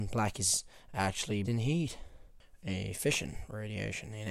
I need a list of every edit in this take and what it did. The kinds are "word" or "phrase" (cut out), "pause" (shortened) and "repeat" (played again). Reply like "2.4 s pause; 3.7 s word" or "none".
1.4 s word